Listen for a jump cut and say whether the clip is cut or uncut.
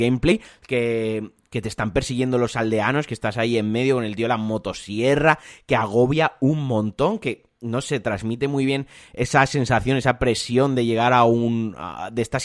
uncut